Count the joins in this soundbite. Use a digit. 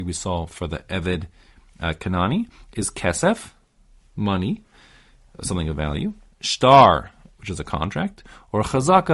0